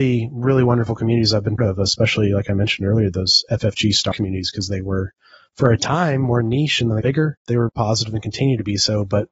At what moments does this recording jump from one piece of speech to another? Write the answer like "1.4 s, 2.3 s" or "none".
1.6 s, 4.1 s, 7.0 s, 7.7 s